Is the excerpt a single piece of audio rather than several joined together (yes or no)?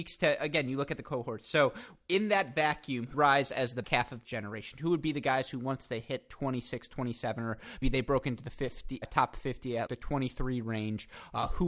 no